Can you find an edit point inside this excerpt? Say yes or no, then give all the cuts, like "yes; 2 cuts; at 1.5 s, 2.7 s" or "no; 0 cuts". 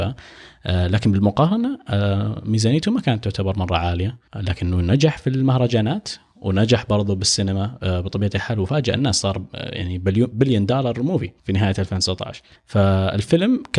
yes; 3 cuts; at 4.3 s, 11.4 s, 12.6 s